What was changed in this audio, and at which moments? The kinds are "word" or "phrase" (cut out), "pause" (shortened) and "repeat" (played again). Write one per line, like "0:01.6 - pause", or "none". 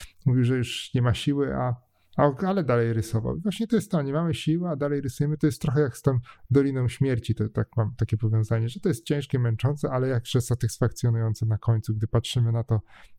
none